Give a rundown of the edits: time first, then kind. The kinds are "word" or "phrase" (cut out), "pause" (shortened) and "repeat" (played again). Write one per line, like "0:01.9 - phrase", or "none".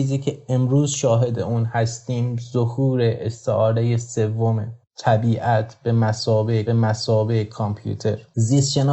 0:06.7 - repeat